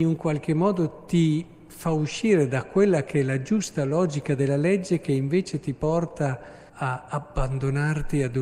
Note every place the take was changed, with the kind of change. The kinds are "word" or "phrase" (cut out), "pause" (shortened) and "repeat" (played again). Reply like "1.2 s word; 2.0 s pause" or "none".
6.7 s pause